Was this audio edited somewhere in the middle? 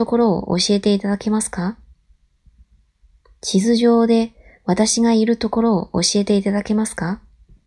no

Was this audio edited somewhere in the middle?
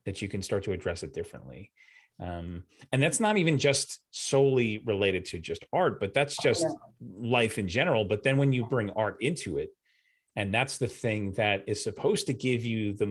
no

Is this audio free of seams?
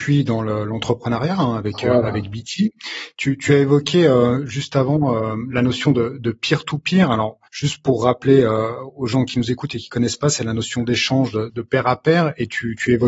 no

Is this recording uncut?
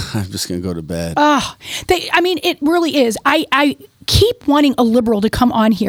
yes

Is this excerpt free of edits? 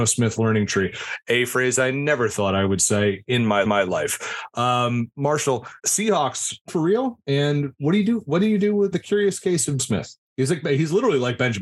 no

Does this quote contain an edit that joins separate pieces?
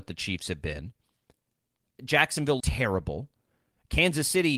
yes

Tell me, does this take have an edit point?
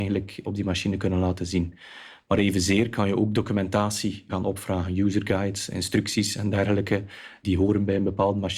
no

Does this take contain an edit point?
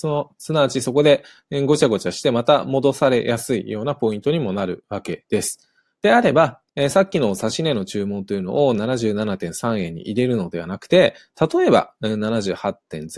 yes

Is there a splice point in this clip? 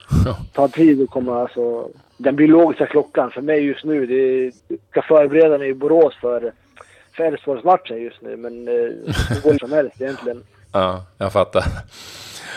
yes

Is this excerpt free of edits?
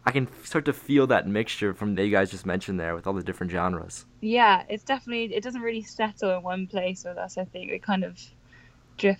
no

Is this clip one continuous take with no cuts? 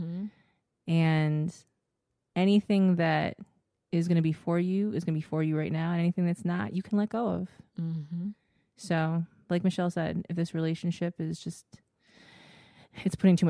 yes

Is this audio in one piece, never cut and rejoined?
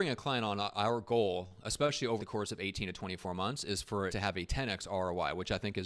no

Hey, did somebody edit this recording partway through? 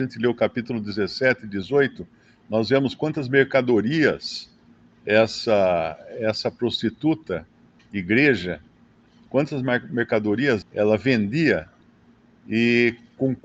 yes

